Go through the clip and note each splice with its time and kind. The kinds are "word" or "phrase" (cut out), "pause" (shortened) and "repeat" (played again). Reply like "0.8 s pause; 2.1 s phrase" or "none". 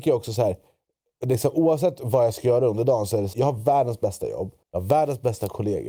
3.3 s word; 4.6 s pause